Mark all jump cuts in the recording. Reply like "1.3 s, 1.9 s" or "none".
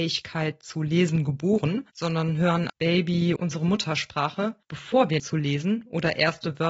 1.9 s, 2.7 s, 3.4 s, 4.6 s, 5.2 s